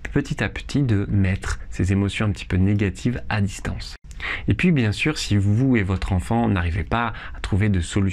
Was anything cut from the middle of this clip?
no; 0 cuts

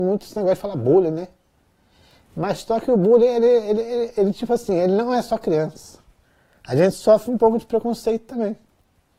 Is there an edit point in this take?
no; 0 cuts

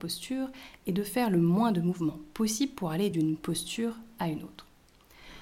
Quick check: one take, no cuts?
yes; 0 cuts

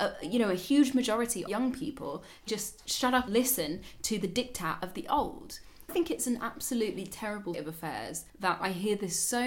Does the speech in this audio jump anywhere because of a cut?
yes; 6 cuts; at 1.5 s, 2.5 s, 3.3 s, 5.9 s, 7.5 s, 8.3 s

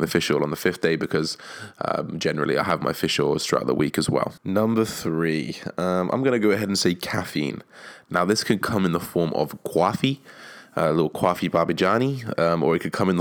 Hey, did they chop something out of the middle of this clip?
yes; 1 cut; at 4.4 s

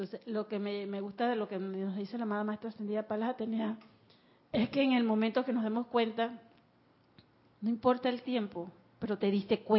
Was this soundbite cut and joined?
no; 0 cuts

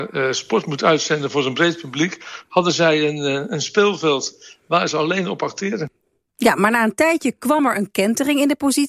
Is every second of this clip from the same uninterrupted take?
yes; 0 cuts

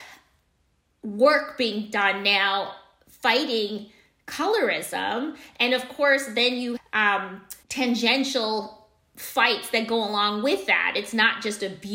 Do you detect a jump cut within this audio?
yes; 2 cuts; at 6.8 s, 7.6 s

